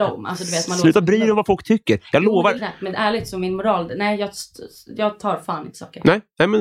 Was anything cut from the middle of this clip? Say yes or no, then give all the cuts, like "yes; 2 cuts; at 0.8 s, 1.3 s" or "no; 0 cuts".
yes; 1 cut; at 2.6 s